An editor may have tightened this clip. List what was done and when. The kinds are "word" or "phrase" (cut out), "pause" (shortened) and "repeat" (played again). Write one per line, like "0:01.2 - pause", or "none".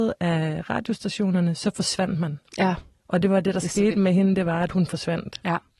none